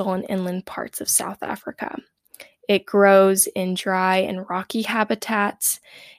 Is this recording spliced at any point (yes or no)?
no